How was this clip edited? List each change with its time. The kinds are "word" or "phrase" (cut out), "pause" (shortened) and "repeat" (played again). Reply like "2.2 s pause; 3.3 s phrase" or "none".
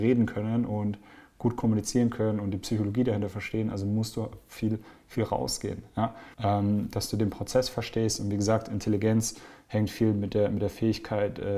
6.3 s pause